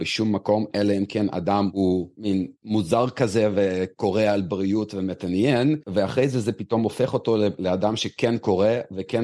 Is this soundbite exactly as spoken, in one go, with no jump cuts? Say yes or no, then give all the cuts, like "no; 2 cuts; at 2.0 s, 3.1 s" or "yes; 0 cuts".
no; 1 cut; at 2.5 s